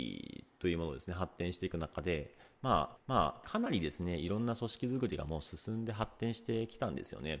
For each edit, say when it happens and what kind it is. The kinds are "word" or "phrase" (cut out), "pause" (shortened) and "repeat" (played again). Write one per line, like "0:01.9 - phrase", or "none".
0:03.0 - repeat